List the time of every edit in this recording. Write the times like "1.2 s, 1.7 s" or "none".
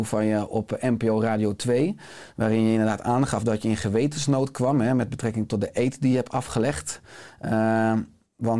none